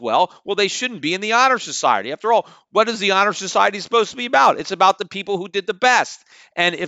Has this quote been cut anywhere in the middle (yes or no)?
no